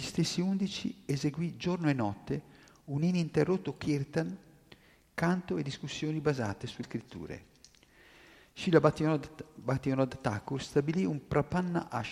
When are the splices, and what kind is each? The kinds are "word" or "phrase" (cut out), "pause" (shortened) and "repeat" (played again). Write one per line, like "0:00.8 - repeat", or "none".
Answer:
0:06.8 - word